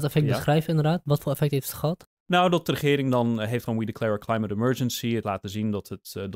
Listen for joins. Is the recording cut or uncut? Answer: cut